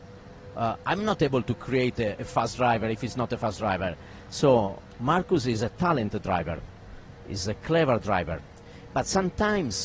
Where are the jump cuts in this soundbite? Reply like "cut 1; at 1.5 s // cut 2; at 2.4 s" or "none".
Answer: none